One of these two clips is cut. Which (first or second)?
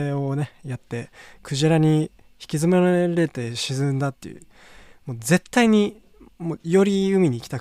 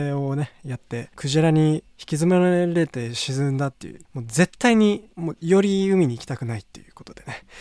second